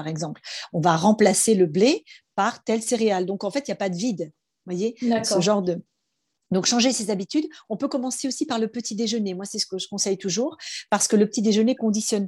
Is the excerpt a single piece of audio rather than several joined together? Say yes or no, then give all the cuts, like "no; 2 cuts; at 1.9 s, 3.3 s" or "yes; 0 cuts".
yes; 0 cuts